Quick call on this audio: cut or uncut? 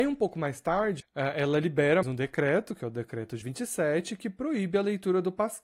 cut